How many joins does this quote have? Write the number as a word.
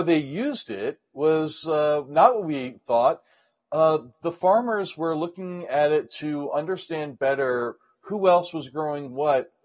zero